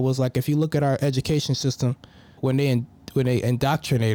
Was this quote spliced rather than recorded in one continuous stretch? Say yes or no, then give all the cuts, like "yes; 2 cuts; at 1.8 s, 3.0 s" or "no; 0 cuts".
yes; 1 cut; at 2.4 s